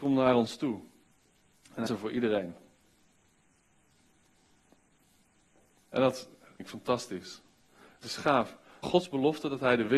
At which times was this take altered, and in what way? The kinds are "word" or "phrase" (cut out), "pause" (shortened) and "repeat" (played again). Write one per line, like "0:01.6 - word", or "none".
0:01.9 - word
0:06.6 - word
0:08.0 - word
0:08.8 - word